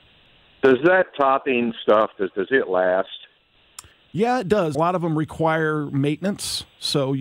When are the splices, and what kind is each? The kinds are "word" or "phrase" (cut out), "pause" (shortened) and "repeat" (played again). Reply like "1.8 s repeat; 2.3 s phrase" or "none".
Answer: 2.3 s repeat; 3.9 s pause; 4.7 s phrase